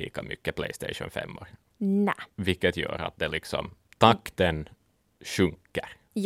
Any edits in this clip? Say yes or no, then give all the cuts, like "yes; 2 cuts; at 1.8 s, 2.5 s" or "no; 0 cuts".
no; 0 cuts